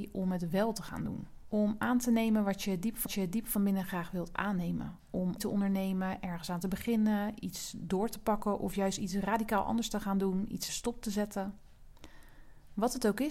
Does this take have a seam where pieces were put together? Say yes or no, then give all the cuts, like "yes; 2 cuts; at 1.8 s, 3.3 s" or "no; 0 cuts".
yes; 3 cuts; at 3.1 s, 5.4 s, 10.7 s